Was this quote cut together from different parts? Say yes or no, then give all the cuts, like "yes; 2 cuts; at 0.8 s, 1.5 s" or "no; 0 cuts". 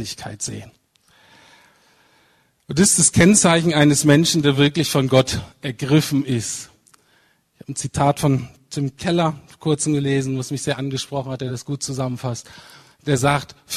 no; 0 cuts